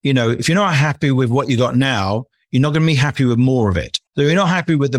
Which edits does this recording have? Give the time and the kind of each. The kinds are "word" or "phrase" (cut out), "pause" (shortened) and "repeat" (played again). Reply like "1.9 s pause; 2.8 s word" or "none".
4.1 s pause